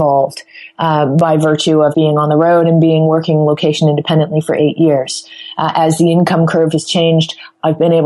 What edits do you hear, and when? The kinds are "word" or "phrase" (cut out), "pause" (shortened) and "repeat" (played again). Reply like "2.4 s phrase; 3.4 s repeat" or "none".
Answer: 1.9 s word